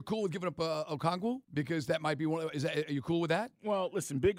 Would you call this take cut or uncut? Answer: cut